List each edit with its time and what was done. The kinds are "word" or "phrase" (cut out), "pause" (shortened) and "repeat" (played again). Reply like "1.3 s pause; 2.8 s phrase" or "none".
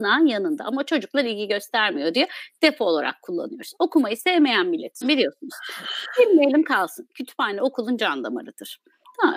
5.0 s word